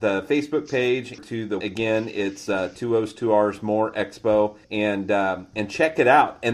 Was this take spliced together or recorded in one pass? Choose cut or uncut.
cut